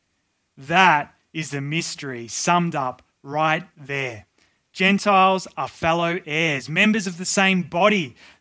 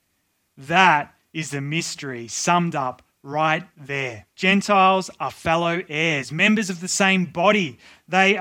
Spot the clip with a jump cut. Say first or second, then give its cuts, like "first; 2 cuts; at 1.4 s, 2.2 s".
second; 1 cut; at 4.3 s